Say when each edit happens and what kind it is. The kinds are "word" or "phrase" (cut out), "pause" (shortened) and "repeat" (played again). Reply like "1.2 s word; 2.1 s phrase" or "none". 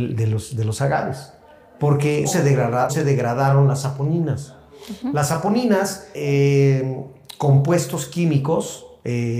2.2 s word; 2.9 s word; 6.1 s word